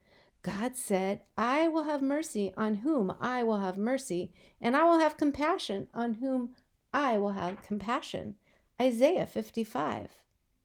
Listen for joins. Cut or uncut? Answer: uncut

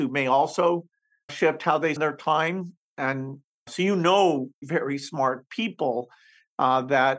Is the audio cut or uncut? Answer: cut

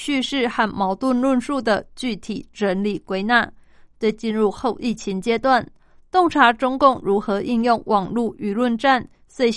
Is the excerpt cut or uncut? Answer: uncut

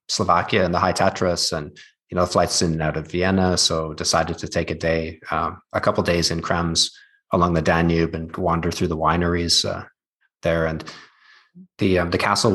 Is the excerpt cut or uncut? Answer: uncut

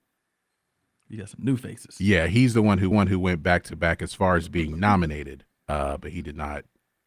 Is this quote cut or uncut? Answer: cut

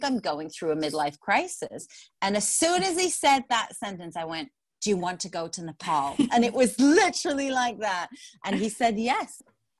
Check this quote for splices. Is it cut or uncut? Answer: uncut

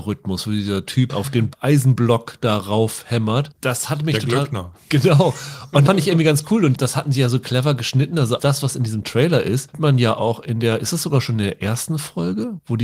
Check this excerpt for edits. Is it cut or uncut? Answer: cut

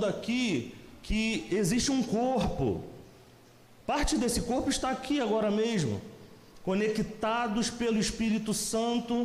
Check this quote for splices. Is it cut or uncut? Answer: uncut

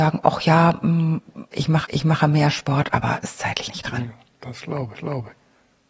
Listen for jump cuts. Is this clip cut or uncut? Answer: cut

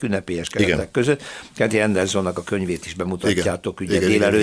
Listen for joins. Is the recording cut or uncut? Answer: uncut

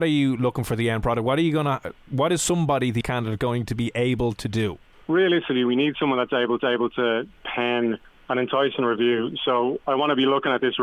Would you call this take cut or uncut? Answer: cut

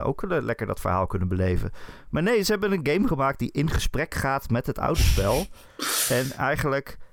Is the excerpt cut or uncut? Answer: uncut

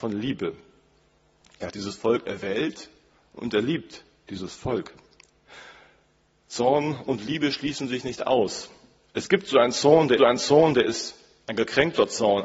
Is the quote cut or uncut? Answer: cut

